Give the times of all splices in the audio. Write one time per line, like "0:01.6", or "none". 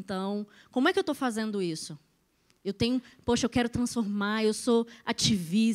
none